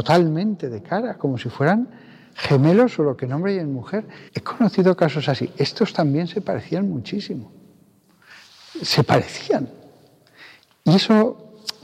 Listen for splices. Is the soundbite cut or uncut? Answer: cut